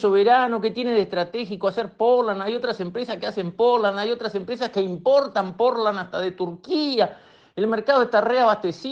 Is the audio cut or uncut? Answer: uncut